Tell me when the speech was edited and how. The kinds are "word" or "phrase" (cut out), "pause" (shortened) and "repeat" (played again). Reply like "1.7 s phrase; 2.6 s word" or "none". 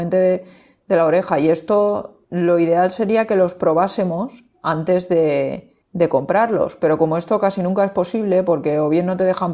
2.2 s pause; 5.8 s pause